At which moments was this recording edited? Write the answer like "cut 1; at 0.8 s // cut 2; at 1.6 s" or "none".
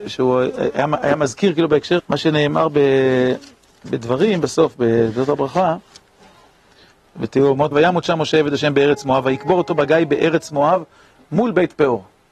cut 1; at 2.0 s // cut 2; at 7.7 s